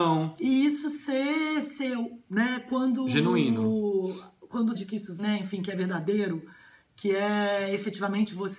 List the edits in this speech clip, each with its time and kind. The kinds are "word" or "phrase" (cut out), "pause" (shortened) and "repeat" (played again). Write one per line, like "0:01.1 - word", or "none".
0:04.7 - phrase
0:05.2 - word